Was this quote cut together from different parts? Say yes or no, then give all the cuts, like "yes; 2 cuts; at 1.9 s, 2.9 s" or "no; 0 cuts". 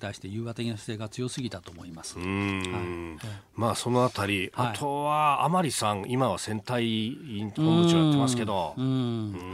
no; 0 cuts